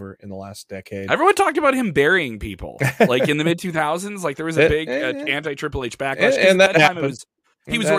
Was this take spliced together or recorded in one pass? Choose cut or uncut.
uncut